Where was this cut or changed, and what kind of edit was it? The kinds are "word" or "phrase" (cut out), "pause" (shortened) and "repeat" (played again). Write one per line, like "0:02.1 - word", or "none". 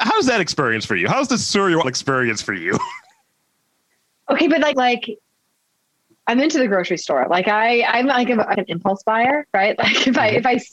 0:01.8 - word
0:04.7 - word
0:08.5 - word